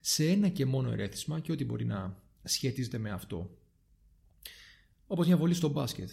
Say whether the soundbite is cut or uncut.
uncut